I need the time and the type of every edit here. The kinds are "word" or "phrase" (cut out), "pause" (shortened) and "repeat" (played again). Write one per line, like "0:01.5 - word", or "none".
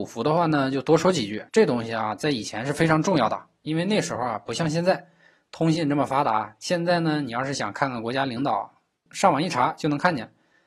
0:01.5 - pause